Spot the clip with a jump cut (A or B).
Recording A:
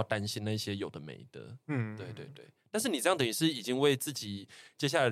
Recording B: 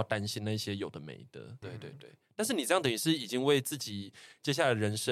B